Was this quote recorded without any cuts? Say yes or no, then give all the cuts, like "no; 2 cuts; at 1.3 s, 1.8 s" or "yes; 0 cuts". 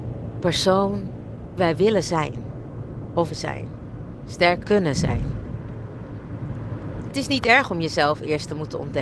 no; 4 cuts; at 1.6 s, 3.3 s, 4.6 s, 7.1 s